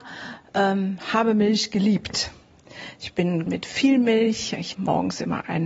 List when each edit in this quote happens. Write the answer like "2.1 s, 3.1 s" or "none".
3.5 s, 4.7 s